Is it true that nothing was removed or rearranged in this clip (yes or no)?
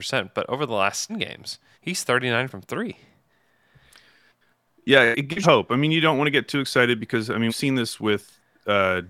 no